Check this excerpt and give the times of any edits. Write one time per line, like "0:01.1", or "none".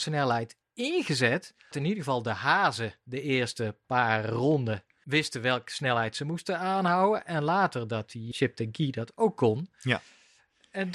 0:01.7
0:03.8
0:05.0
0:08.3